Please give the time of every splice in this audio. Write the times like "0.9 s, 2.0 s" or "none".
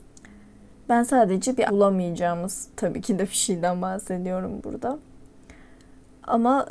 1.7 s